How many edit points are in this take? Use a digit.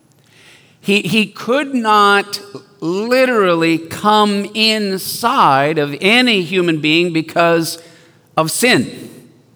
0